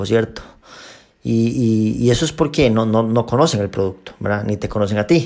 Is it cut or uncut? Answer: uncut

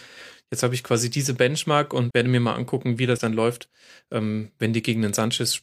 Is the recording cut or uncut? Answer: cut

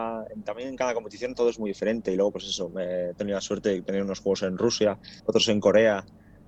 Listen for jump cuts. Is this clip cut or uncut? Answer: cut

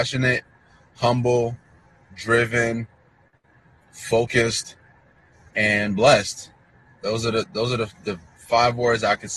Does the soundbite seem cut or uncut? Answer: uncut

